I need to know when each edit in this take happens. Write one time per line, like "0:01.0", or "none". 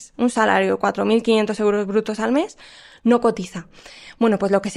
none